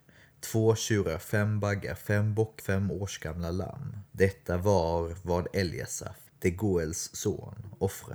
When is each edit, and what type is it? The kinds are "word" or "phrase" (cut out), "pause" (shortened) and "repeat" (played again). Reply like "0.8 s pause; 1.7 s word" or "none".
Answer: 2.6 s word; 4.1 s pause; 6.3 s pause